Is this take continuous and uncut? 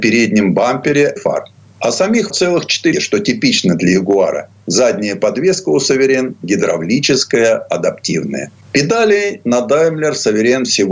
no; 3 cuts; at 1.2 s, 2.3 s, 2.9 s

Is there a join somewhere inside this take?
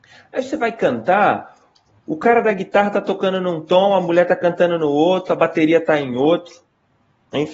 no; 0 cuts

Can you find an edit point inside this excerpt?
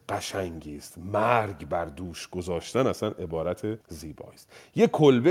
yes; 1 cut; at 3.8 s

